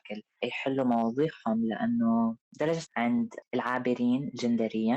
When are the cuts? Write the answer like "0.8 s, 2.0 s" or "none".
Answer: 2.9 s